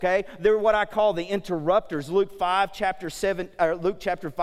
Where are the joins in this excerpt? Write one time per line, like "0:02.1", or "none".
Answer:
none